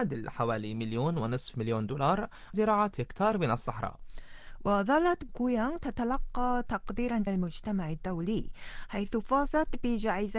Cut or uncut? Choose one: cut